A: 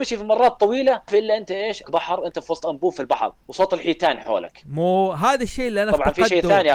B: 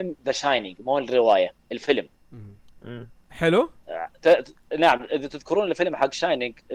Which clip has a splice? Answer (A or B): A